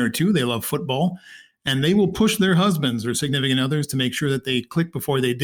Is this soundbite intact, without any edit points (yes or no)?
yes